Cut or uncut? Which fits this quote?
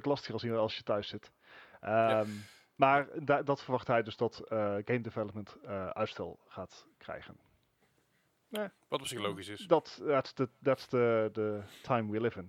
uncut